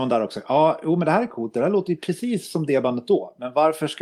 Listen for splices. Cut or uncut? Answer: uncut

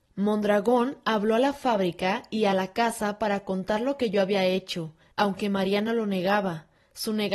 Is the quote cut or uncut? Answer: uncut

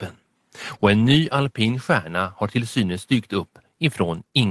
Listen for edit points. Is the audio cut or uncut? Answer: uncut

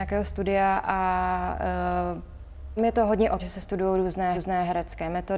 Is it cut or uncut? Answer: cut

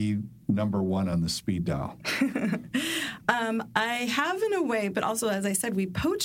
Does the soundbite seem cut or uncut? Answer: uncut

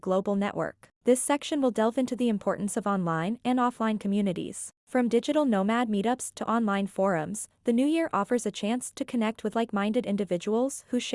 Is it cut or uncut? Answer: cut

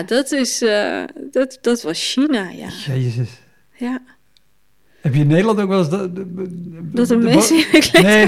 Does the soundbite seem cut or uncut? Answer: uncut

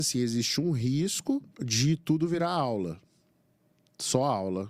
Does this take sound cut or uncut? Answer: cut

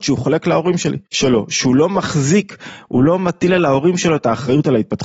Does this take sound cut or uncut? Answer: cut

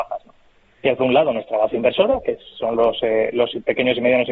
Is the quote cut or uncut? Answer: cut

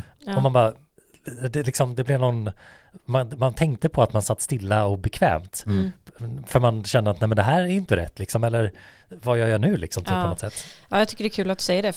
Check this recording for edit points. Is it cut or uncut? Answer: uncut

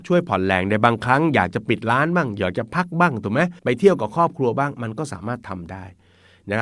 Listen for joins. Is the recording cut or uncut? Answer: cut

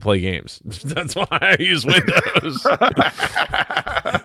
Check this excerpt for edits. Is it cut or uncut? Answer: uncut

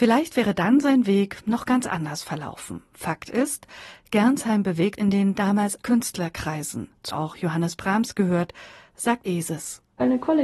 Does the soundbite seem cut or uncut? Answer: cut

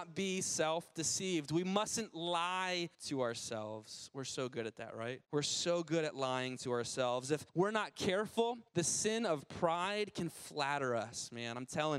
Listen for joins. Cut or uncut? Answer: cut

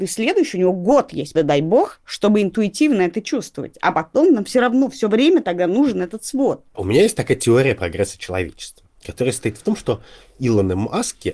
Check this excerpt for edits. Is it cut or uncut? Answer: cut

